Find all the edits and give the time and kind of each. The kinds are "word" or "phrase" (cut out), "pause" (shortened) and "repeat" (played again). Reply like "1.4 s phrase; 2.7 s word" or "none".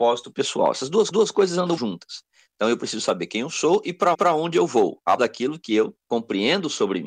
1.1 s repeat; 1.8 s word; 4.1 s repeat; 5.2 s word; 6.0 s pause